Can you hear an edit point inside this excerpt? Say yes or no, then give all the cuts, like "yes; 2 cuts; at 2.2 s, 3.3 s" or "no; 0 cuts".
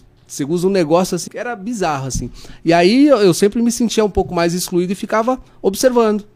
yes; 1 cut; at 1.3 s